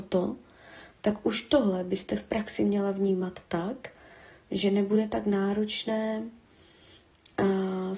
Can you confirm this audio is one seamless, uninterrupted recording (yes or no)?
yes